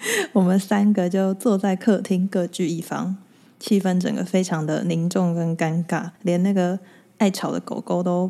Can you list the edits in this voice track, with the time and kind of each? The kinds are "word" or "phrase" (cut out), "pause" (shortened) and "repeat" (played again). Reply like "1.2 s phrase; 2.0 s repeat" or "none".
6.2 s pause